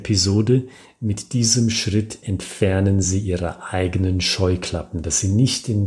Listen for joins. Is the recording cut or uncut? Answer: uncut